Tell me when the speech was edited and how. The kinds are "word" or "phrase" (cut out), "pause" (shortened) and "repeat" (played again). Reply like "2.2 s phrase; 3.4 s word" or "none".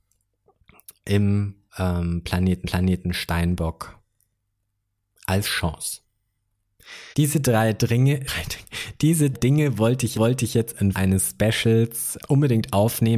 1.7 s pause; 2.6 s repeat; 7.1 s pause; 8.3 s word; 9.3 s word; 10.1 s repeat; 10.9 s word; 12.2 s word

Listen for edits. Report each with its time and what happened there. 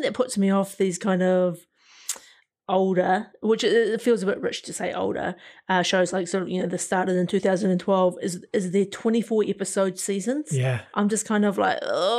none

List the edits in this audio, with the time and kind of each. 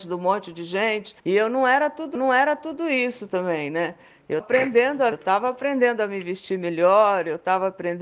1.2 s pause; 2.2 s repeat; 4.4 s word; 5.1 s word

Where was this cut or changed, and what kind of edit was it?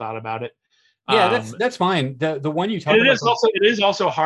none

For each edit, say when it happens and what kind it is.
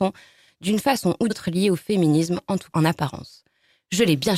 1.3 s word; 2.7 s word

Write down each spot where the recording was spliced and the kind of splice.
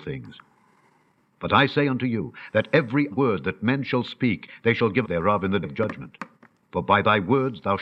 3.1 s word; 5.0 s word; 5.6 s word

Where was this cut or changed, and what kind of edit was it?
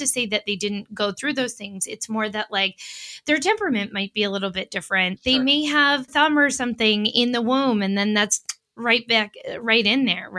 6.1 s phrase

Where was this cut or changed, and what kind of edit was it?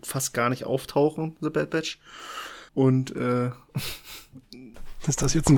2.7 s pause

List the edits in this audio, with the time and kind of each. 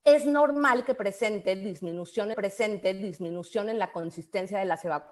2.3 s repeat

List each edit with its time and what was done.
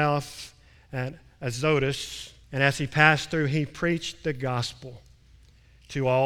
2.4 s pause

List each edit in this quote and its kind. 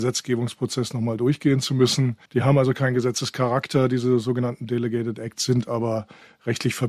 2.3 s pause

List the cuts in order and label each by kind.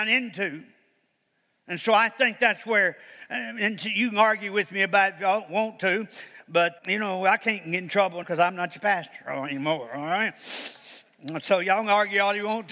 6.8 s word; 8.2 s word

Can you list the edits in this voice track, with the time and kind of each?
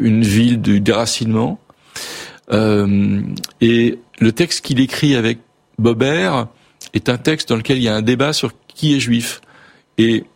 4.1 s pause

